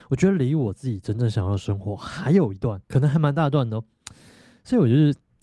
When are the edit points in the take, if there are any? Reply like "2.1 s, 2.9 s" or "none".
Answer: 2.8 s